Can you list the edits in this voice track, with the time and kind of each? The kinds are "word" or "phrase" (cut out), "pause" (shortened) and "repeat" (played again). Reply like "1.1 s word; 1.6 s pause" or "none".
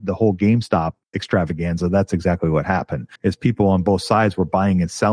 1.0 s pause; 3.2 s pause